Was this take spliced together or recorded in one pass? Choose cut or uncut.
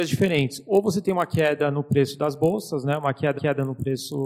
cut